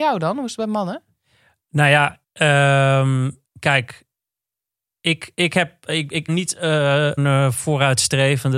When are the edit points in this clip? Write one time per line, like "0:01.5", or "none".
0:02.2
0:03.4
0:06.3
0:07.2